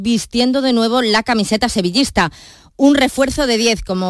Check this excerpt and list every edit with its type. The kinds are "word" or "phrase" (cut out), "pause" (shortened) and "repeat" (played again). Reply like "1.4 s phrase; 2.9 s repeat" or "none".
none